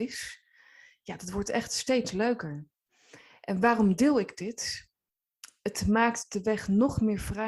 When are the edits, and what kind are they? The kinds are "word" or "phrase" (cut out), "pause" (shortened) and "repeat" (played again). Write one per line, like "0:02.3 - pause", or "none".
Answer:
none